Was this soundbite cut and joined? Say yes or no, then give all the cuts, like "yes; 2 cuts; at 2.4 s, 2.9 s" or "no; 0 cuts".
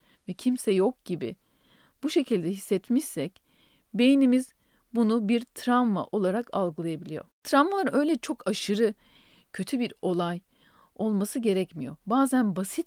no; 0 cuts